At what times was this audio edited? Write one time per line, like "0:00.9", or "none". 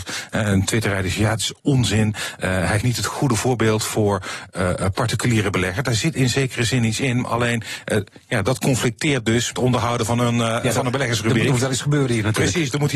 0:02.8
0:09.5